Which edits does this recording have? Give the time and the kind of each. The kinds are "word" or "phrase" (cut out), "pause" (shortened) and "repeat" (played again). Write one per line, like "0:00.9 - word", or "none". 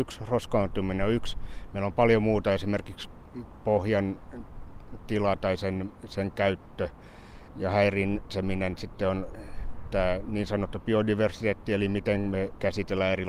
0:07.5 - pause